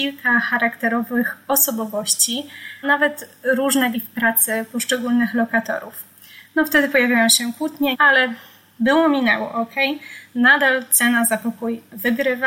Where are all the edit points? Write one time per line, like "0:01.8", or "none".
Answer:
0:02.8
0:03.9
0:07.9